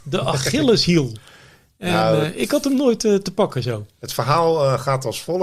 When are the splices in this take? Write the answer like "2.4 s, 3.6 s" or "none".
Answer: none